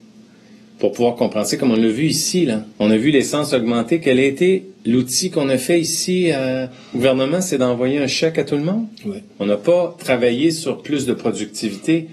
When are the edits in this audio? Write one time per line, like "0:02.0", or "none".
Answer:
0:02.8
0:04.8
0:09.3